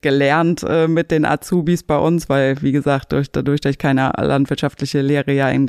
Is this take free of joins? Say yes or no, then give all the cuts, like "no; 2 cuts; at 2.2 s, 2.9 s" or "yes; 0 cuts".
yes; 0 cuts